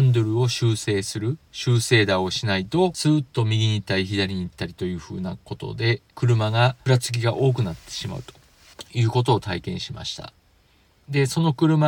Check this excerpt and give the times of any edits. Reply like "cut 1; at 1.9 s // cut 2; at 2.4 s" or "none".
cut 1; at 6.1 s